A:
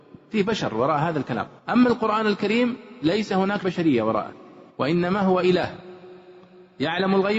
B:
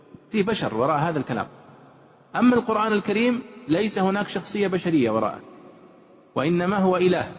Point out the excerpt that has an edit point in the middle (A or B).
A